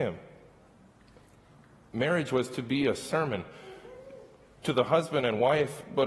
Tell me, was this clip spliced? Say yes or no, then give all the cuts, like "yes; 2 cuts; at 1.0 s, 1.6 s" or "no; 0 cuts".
no; 0 cuts